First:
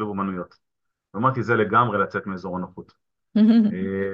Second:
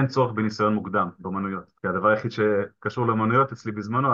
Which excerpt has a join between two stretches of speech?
second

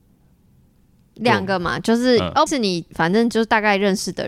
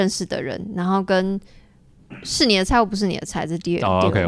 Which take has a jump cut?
first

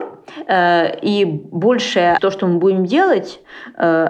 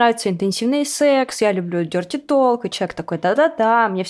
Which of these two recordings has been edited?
first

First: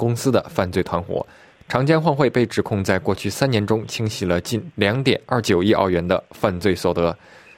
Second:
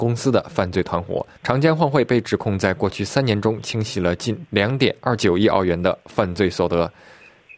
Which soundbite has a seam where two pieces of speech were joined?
second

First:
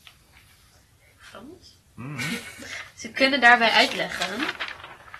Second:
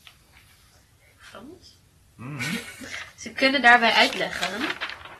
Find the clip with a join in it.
first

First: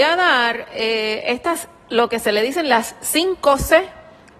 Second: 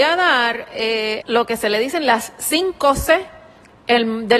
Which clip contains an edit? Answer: second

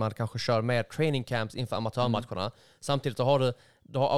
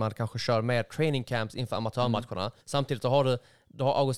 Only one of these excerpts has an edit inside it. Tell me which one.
second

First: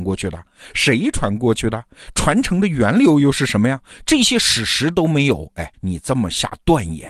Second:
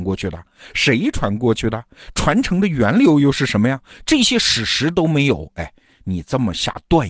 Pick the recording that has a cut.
first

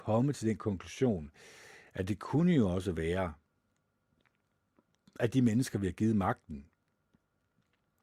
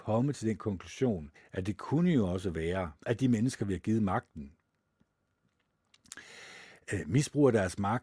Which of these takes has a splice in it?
second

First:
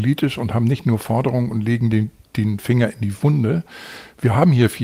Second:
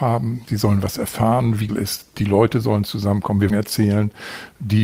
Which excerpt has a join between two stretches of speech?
second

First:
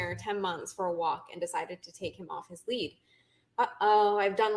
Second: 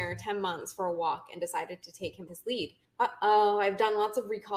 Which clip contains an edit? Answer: second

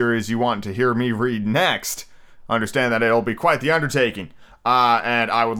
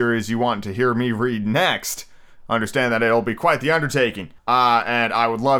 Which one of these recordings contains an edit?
second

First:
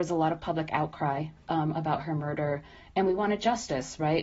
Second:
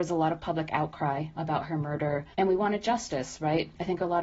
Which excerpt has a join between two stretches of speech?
second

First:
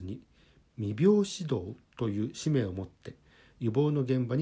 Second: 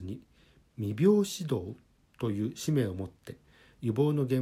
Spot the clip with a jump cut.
first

